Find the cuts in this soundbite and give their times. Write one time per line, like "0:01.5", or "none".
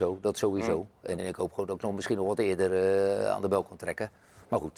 0:01.2